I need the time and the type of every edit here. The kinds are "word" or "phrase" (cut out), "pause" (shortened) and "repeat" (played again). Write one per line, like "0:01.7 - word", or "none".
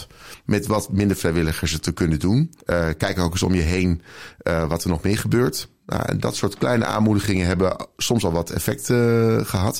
0:02.6 - pause